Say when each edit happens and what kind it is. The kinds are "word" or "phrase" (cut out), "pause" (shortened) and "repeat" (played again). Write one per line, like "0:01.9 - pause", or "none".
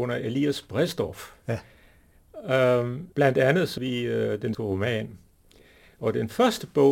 0:03.1 - pause
0:03.8 - word
0:04.5 - word

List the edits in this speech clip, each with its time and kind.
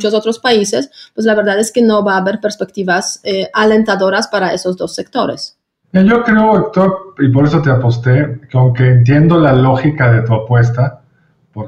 none

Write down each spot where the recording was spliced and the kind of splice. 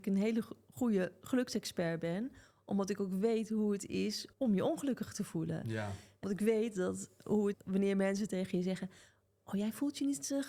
0:04.3 - pause
0:06.2 - word
0:07.5 - word

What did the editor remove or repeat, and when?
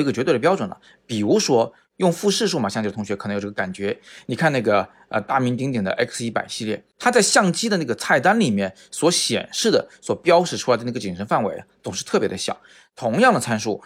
0:06.9 - pause

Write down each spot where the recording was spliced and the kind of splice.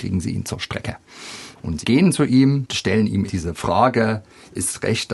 0:01.8 - word
0:02.7 - word
0:03.3 - word

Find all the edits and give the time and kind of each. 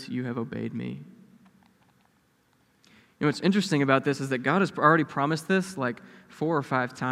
none

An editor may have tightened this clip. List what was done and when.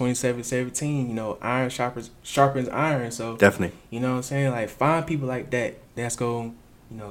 0:05.8 - pause

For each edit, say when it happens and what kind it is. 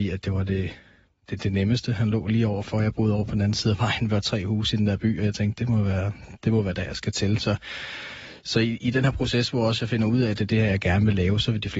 none

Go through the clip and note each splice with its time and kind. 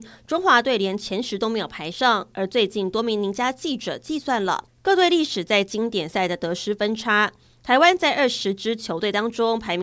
none

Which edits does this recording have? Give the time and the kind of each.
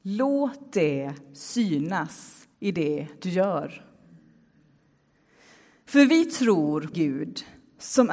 0:02.5 - pause
0:06.9 - phrase

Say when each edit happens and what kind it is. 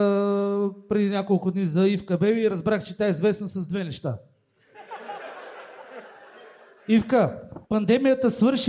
0:07.6 - pause

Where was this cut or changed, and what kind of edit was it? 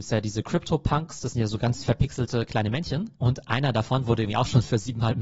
0:03.1 - pause

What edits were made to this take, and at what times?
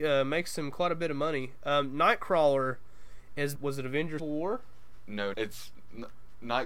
0:03.6 - phrase
0:04.2 - word
0:05.3 - word

